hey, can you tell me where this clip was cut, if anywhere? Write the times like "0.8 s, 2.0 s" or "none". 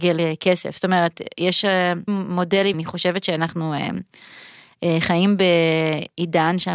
2.1 s, 2.7 s